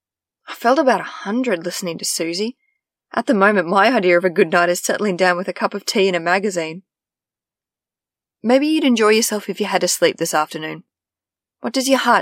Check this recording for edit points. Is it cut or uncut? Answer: uncut